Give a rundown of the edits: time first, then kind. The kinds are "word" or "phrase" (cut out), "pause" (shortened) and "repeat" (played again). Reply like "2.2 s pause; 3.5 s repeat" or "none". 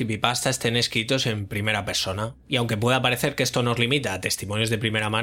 2.4 s pause